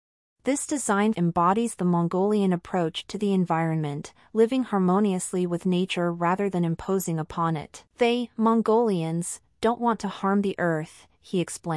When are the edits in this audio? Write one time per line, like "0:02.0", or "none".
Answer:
0:01.1
0:07.9